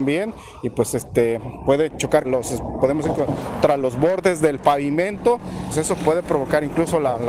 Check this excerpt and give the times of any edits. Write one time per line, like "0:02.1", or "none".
0:02.2
0:05.7